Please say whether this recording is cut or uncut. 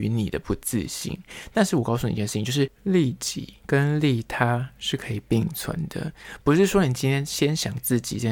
cut